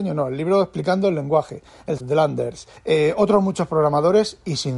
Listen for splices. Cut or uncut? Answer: cut